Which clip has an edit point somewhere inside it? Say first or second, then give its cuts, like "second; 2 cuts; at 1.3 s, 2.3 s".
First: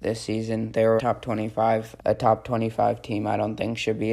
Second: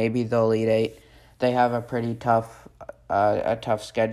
first; 2 cuts; at 1.0 s, 2.0 s